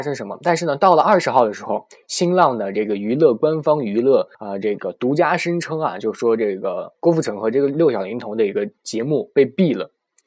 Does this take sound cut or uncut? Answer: cut